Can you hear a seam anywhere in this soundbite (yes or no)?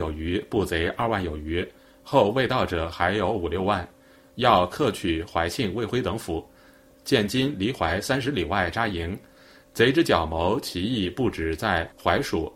no